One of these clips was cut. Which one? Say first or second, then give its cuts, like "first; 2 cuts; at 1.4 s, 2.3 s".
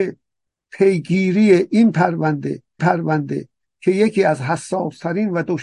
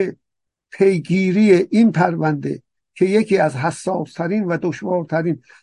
first; 1 cut; at 2.8 s